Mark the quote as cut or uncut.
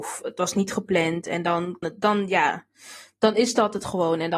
cut